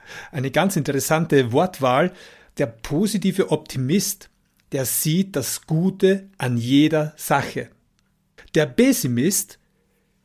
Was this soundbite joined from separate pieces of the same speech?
no; 0 cuts

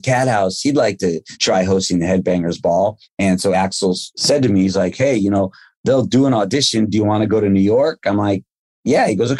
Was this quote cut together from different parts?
no; 0 cuts

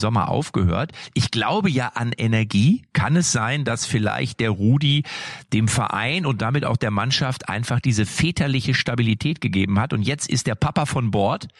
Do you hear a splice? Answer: no; 0 cuts

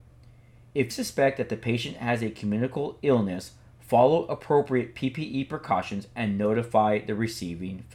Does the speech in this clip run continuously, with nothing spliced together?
no; 1 cut; at 0.9 s

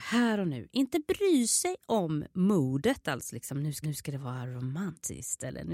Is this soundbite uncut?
no; 1 cut; at 3.8 s

